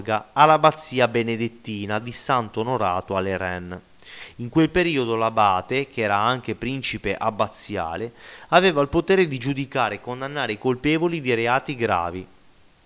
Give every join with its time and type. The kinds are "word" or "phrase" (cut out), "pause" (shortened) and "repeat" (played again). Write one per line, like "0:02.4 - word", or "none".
0:02.0 - word